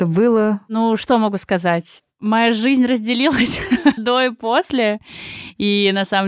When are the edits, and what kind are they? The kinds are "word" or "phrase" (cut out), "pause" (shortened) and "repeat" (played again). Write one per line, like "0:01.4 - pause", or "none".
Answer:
0:04.0 - word